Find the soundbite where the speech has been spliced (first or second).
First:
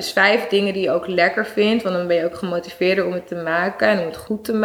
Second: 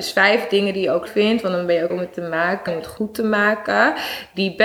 second